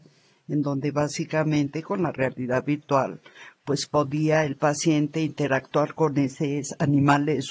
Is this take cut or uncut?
uncut